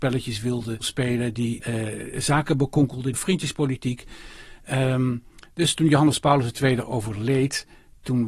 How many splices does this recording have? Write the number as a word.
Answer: zero